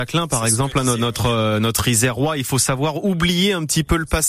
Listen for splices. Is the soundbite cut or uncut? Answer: uncut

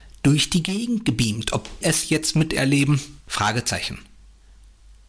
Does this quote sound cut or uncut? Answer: cut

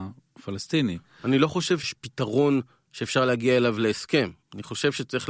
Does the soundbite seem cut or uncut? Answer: uncut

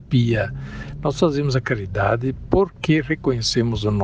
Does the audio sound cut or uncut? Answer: uncut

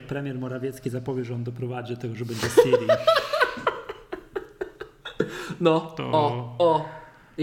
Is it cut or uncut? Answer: uncut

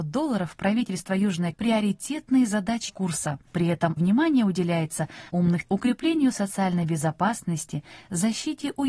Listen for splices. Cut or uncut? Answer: cut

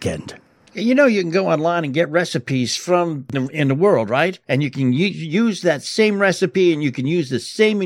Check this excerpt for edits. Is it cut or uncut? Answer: cut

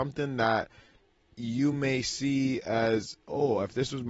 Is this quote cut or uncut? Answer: uncut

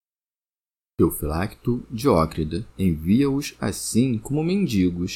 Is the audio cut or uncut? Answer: cut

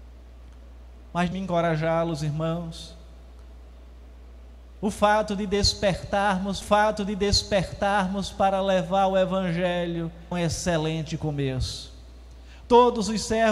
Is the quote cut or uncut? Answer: cut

